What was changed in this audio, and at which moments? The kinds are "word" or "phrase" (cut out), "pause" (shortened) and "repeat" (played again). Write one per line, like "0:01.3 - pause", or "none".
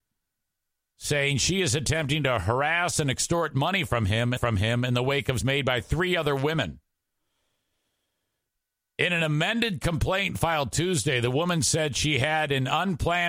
0:04.4 - repeat
0:05.4 - phrase